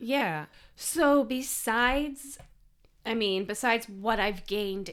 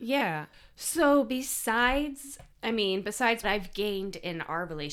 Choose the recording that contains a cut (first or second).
second